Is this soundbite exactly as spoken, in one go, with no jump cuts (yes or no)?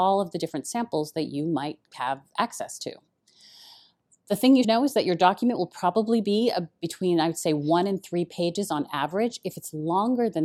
no